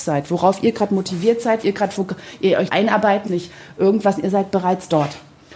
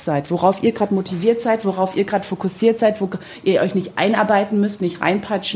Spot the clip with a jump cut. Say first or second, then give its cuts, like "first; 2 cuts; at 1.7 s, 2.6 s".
first; 4 cuts; at 1.6 s, 1.9 s, 2.7 s, 3.3 s